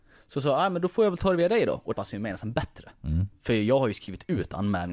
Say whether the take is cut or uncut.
cut